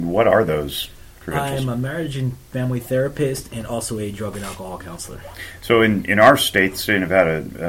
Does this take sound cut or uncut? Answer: uncut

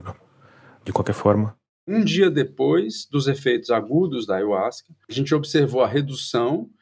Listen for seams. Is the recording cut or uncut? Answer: uncut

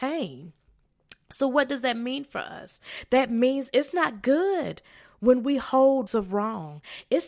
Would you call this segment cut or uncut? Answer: cut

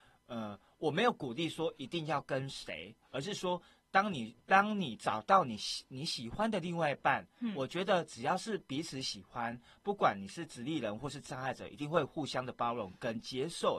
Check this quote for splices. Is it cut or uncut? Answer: uncut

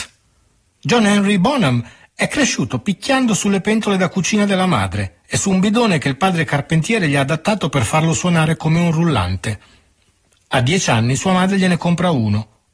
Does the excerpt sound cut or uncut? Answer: uncut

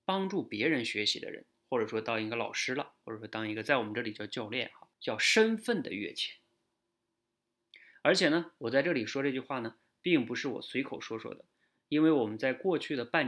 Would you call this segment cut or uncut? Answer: cut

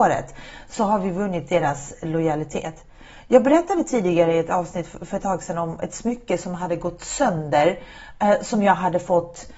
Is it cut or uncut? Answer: uncut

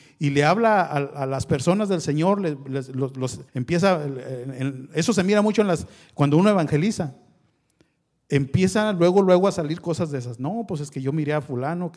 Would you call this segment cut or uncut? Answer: cut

